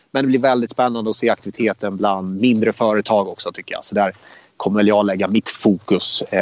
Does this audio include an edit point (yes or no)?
no